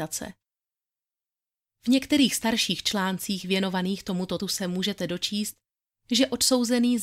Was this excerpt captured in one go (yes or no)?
no